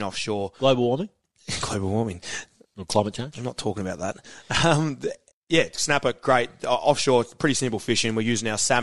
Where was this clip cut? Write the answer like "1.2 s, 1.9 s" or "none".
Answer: 5.3 s